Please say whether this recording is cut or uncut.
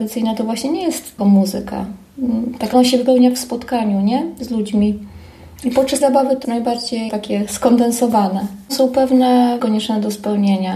cut